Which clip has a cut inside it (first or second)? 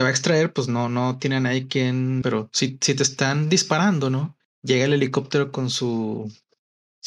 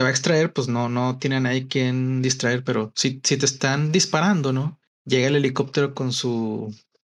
first